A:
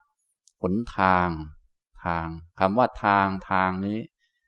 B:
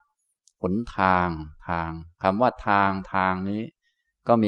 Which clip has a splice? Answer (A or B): B